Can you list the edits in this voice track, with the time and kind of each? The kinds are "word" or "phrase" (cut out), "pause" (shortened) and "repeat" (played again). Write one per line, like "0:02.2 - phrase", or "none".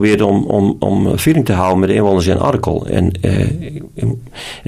none